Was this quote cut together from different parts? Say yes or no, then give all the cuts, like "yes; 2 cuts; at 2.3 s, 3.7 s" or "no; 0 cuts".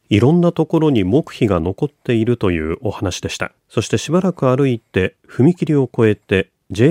yes; 1 cut; at 3.6 s